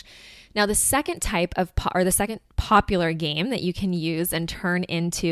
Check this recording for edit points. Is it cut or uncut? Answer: uncut